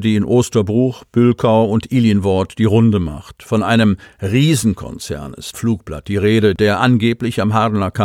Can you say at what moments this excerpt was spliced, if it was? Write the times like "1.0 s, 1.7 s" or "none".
5.5 s